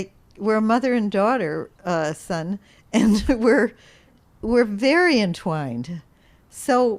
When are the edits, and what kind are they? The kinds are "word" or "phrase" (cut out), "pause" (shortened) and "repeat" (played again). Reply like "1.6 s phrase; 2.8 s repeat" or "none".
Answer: none